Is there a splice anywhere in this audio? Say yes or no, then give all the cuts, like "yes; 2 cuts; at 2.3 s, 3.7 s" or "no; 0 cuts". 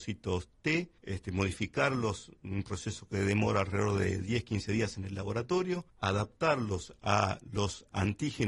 yes; 2 cuts; at 1.0 s, 5.9 s